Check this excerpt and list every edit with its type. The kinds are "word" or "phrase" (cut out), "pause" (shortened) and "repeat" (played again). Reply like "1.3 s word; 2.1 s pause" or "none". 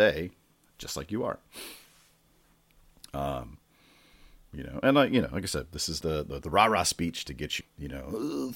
6.0 s word; 6.4 s word; 7.6 s word